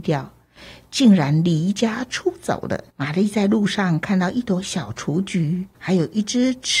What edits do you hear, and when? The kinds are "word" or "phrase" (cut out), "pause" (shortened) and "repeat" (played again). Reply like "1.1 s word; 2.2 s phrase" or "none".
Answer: 2.9 s pause; 5.7 s pause